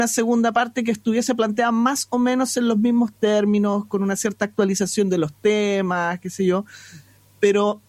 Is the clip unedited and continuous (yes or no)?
yes